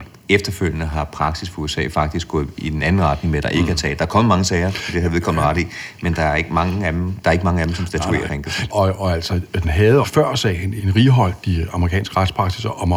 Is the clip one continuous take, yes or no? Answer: no